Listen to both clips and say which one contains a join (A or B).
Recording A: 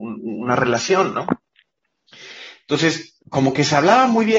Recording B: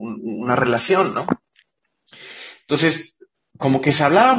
A